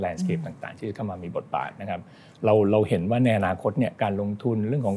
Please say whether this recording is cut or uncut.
uncut